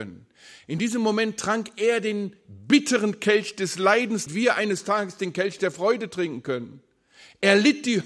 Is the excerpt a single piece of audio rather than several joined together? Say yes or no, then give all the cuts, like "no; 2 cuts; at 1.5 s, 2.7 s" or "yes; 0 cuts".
no; 1 cut; at 4.3 s